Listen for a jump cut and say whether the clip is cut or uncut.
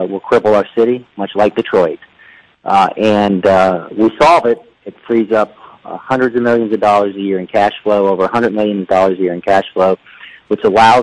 uncut